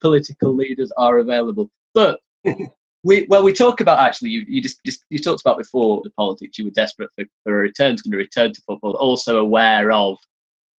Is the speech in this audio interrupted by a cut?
yes; 6 cuts; at 4.5 s, 4.8 s, 6.0 s, 7.3 s, 8.0 s, 8.9 s

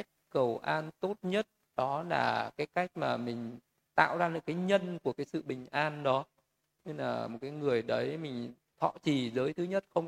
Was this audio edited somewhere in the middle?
no; 0 cuts

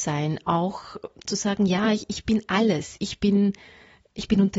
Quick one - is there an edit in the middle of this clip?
no; 0 cuts

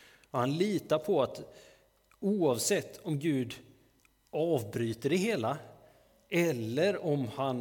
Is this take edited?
no; 0 cuts

